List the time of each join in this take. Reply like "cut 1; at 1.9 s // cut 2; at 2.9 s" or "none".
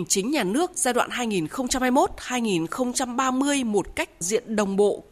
cut 1; at 4.2 s